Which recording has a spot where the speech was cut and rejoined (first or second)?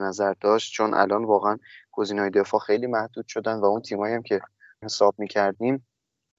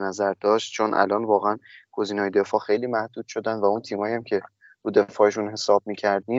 first